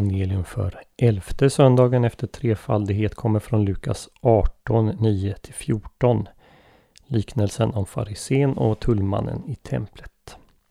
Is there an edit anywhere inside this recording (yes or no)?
no